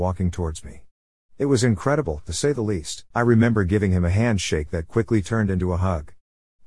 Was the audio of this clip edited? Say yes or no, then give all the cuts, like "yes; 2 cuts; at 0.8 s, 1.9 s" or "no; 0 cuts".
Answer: yes; 1 cut; at 3.1 s